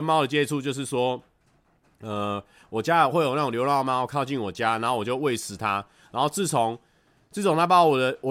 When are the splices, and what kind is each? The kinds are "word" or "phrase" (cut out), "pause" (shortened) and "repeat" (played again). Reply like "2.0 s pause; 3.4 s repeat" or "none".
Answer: none